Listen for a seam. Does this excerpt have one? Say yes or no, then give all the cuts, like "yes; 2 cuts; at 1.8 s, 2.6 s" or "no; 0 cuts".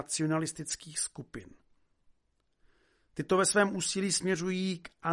no; 0 cuts